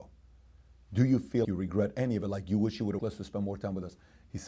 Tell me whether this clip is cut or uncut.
cut